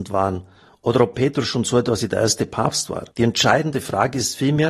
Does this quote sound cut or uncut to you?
cut